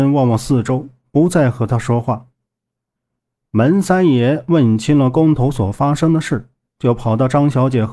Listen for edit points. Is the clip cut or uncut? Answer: uncut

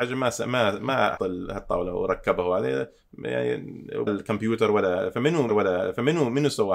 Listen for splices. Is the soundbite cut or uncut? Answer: cut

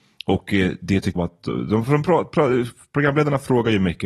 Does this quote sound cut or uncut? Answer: cut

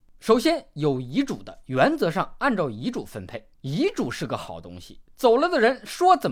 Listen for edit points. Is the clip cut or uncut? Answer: cut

